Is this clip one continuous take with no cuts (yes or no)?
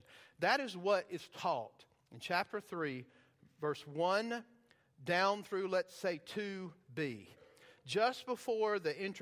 yes